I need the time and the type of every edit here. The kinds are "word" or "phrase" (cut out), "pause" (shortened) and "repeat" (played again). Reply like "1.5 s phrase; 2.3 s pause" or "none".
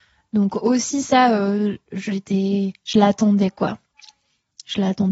none